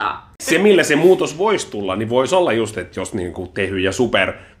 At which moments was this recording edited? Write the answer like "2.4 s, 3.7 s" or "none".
none